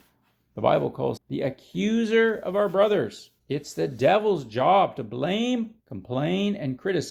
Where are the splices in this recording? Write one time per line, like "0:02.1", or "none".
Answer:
0:01.2
0:03.4
0:05.8

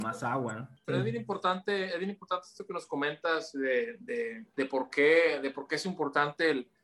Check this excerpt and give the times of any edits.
0:04.5

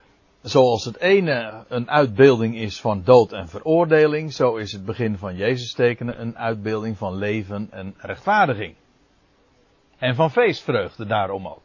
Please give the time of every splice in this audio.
none

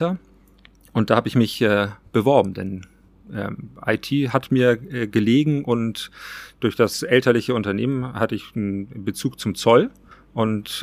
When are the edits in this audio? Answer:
none

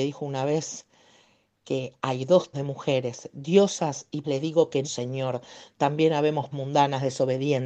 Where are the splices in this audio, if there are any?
0:02.5
0:04.2
0:04.8
0:06.5

